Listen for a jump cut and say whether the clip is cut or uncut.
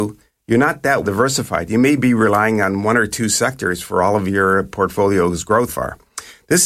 cut